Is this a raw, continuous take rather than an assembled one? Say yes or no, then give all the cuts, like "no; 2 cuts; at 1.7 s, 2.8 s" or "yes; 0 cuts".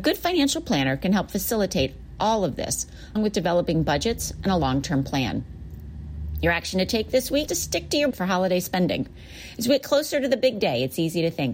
no; 3 cuts; at 3.2 s, 7.5 s, 8.1 s